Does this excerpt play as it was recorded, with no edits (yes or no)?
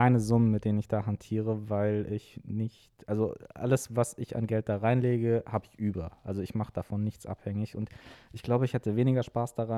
yes